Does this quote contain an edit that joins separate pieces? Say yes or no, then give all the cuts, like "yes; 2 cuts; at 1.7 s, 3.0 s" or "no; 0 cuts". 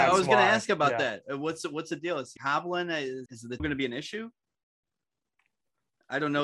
yes; 3 cuts; at 2.4 s, 3.3 s, 3.6 s